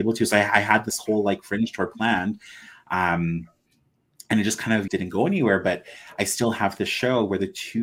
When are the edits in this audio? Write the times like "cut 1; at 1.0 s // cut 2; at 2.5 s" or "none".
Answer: cut 1; at 4.9 s